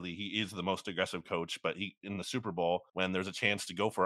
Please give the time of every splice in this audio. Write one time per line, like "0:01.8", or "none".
0:02.9